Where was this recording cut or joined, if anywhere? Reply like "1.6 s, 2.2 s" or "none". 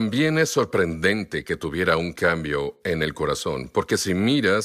none